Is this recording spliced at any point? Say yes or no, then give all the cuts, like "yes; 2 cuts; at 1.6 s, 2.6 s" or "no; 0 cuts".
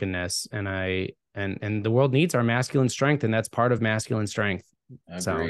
no; 0 cuts